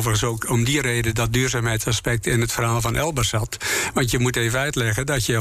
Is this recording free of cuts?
yes; 0 cuts

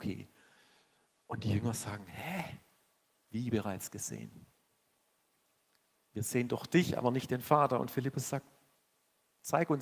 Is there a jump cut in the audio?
no; 0 cuts

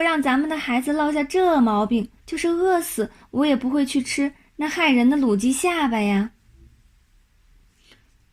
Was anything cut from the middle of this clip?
yes; 1 cut; at 2.2 s

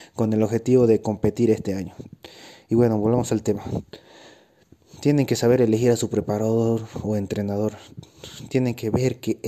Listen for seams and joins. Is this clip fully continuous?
yes; 0 cuts

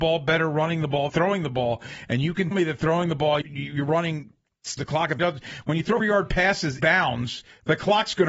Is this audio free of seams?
no; 7 cuts; at 1.1 s, 2.5 s, 3.4 s, 4.8 s, 5.2 s, 6.0 s, 6.8 s

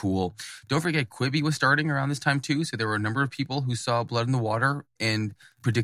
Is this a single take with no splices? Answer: yes; 0 cuts

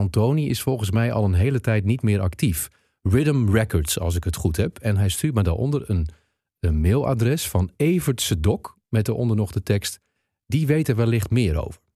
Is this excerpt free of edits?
yes; 0 cuts

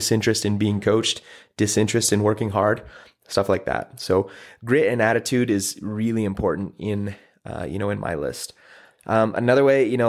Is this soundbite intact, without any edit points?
yes; 0 cuts

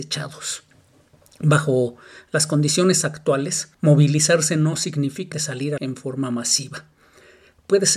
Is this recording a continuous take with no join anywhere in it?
no; 3 cuts; at 3.7 s, 5.3 s, 5.8 s

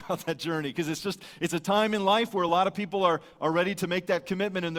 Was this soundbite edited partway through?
no; 0 cuts

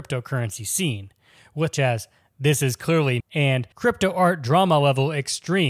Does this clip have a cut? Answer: yes; 3 cuts; at 1.7 s, 3.2 s, 3.7 s

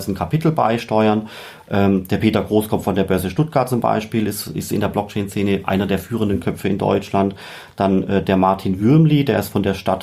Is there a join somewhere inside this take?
no; 0 cuts

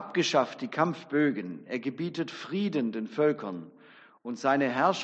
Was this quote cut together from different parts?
no; 0 cuts

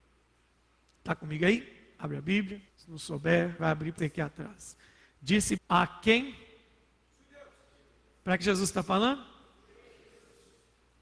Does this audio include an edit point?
yes; 5 cuts; at 2.7 s, 3.6 s, 4.0 s, 5.6 s, 8.4 s

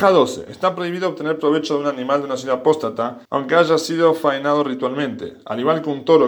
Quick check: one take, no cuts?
no; 1 cut; at 3.2 s

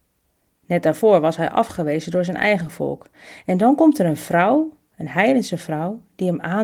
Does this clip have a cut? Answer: no; 0 cuts

